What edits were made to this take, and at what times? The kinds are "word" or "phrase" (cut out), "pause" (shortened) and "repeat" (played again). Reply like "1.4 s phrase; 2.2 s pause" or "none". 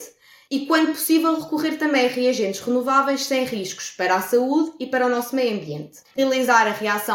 none